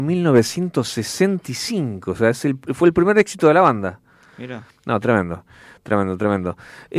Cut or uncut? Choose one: uncut